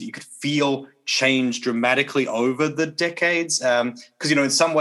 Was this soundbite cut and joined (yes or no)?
no